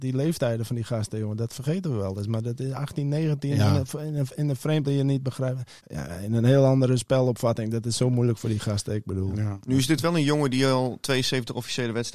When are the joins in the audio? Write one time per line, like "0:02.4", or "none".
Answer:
0:04.8
0:05.8
0:09.3